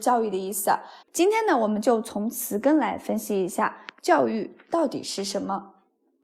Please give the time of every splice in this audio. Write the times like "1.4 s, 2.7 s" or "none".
1.0 s